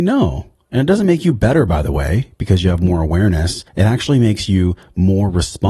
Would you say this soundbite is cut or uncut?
cut